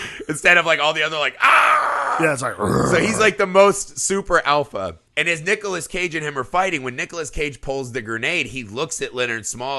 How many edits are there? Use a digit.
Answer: 1